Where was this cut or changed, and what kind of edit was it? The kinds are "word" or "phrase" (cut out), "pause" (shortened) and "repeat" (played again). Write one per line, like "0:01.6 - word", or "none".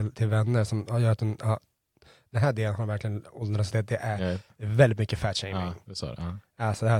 0:03.7 - word